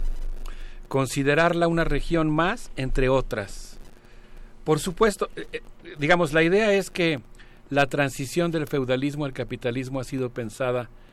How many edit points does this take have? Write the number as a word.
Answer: zero